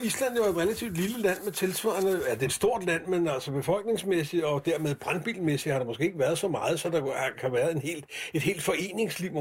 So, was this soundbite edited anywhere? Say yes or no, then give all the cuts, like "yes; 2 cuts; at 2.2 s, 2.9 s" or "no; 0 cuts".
yes; 1 cut; at 7.3 s